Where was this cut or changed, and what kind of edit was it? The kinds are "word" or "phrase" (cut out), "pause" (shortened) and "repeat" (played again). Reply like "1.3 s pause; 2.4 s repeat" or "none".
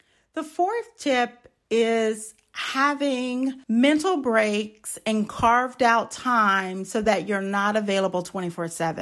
3.6 s pause